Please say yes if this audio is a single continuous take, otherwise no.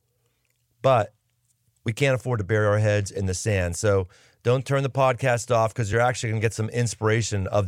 yes